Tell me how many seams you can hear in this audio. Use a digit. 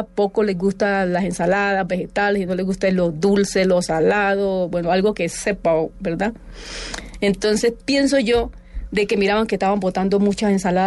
0